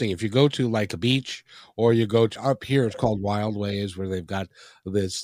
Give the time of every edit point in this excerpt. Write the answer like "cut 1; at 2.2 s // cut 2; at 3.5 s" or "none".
cut 1; at 2.4 s